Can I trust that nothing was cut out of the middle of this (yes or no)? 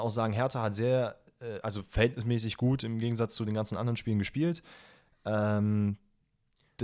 yes